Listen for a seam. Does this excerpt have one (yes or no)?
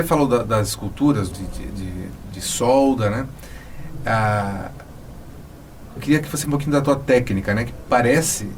yes